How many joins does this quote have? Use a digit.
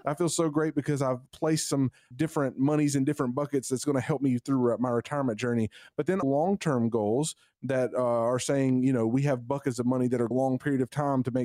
4